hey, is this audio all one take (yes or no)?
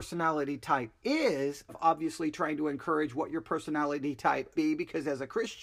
no